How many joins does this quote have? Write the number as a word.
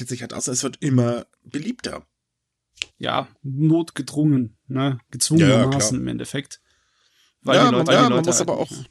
two